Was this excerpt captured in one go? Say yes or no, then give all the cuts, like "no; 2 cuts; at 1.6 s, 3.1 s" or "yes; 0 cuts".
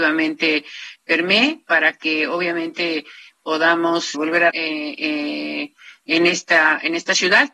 no; 4 cuts; at 1.0 s, 1.7 s, 4.1 s, 4.5 s